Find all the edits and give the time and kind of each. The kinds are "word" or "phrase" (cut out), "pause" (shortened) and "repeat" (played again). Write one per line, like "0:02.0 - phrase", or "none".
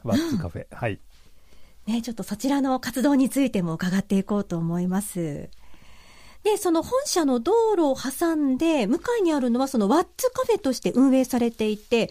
none